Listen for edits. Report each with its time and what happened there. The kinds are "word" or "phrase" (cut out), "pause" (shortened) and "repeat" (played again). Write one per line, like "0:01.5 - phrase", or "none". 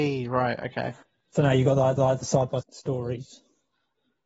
0:01.0 - pause
0:02.0 - repeat
0:02.6 - word